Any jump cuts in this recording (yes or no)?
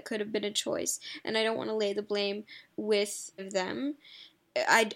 yes